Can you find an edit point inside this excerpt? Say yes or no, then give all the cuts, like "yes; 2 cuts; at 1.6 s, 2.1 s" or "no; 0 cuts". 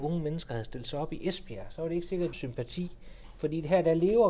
yes; 1 cut; at 2.3 s